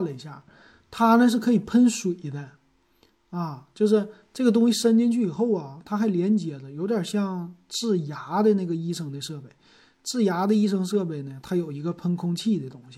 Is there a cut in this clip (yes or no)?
no